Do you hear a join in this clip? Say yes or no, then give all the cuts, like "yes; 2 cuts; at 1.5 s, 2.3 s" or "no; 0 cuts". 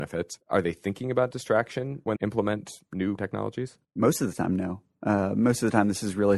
yes; 2 cuts; at 2.2 s, 3.2 s